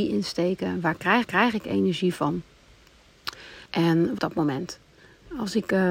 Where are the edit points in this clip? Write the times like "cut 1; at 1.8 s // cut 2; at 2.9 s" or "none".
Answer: cut 1; at 1.2 s // cut 2; at 3.7 s // cut 3; at 4.2 s